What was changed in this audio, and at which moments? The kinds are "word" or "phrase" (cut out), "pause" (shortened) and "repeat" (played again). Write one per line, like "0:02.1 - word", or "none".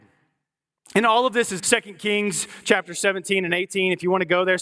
0:01.6 - word

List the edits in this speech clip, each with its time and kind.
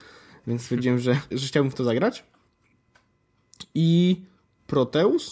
0:01.3 - word

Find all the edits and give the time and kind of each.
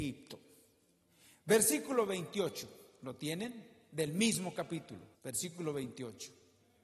0:05.1 - pause

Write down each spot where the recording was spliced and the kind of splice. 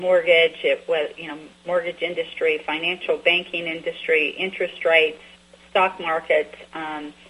none

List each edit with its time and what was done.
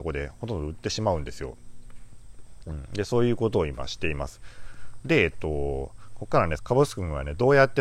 0:06.6 - phrase

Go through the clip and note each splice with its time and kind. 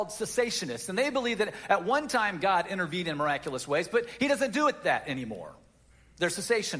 none

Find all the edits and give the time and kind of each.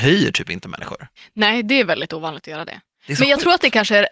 0:01.2 - pause

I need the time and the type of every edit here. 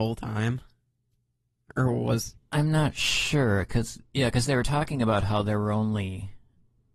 none

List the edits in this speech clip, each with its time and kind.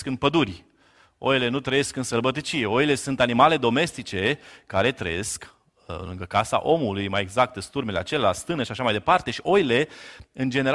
none

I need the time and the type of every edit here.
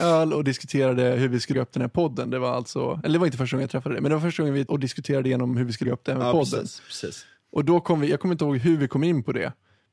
0:01.5 - word
0:04.7 - word
0:05.8 - word

